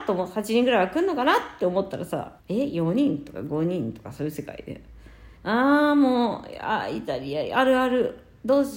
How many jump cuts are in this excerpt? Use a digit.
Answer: 2